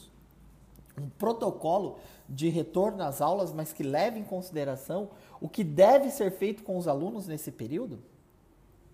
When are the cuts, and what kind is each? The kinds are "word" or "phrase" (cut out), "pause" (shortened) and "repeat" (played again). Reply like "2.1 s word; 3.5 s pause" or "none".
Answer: none